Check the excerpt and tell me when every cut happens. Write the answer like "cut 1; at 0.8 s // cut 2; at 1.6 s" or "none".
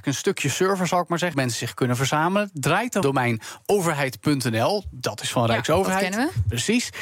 cut 1; at 1.3 s // cut 2; at 3.0 s